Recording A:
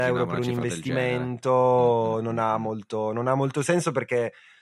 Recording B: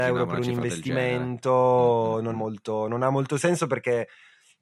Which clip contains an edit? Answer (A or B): B